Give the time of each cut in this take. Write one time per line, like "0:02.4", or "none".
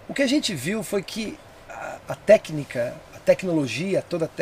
0:02.0
0:03.1